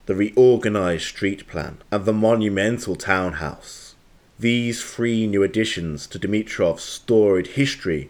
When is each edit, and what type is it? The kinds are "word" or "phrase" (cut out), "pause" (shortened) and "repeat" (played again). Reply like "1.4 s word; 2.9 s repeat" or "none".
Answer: 1.8 s pause; 4.2 s pause